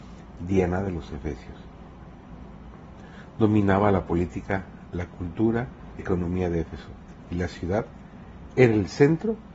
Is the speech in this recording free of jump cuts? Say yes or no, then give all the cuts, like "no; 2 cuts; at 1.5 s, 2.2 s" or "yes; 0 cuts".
no; 1 cut; at 6.0 s